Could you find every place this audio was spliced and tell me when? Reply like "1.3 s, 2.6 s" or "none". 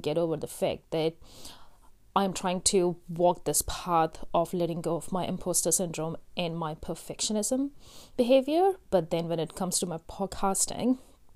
none